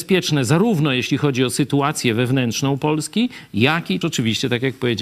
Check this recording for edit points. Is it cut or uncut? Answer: cut